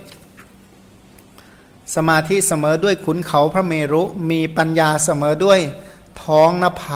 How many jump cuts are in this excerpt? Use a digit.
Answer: 0